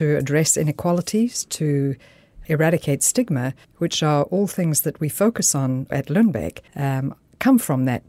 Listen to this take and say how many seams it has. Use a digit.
4